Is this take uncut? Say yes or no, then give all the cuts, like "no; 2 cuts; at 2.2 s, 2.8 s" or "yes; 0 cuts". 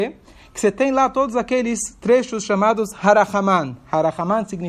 yes; 0 cuts